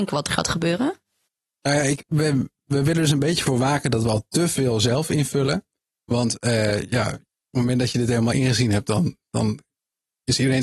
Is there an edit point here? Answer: no; 0 cuts

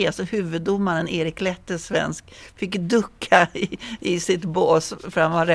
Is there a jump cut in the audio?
no; 0 cuts

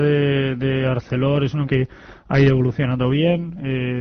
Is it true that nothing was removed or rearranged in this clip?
no; 1 cut; at 1.7 s

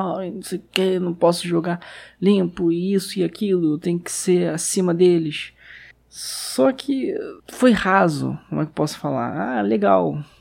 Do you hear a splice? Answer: yes; 2 cuts; at 5.9 s, 7.4 s

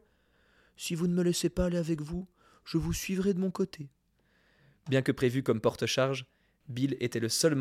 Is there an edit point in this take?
no; 0 cuts

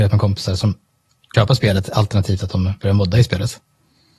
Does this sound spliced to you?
yes; 1 cut; at 1.3 s

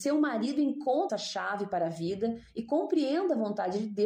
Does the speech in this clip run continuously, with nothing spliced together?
no; 1 cut; at 1.1 s

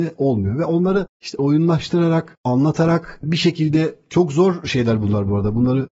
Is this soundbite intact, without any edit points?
no; 1 cut; at 1.1 s

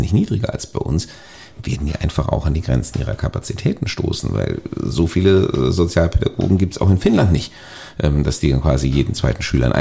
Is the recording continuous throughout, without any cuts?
yes; 0 cuts

